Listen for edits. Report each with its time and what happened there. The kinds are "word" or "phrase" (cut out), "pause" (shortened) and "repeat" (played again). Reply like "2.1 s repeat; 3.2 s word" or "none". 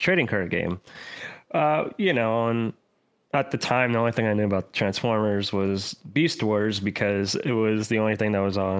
none